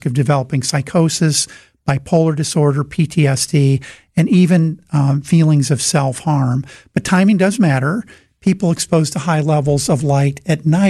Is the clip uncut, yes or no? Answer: yes